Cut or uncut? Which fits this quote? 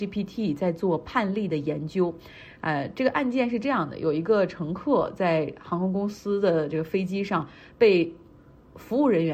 uncut